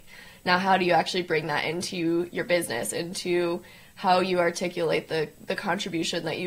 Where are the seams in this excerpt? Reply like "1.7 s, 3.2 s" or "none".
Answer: none